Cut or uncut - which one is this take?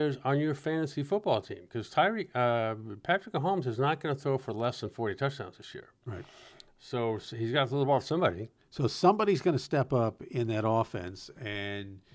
uncut